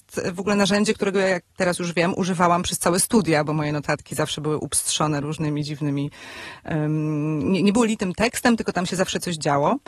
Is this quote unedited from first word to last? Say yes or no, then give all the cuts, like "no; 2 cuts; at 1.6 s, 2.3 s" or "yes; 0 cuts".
no; 1 cut; at 1.5 s